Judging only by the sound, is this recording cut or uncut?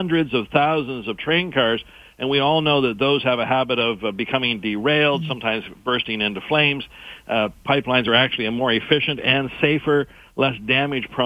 uncut